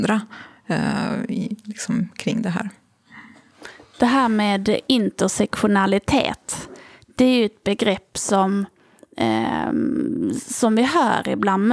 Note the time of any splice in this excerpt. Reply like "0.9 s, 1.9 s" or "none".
none